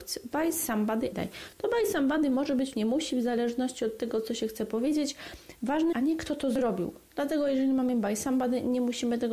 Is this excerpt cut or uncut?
cut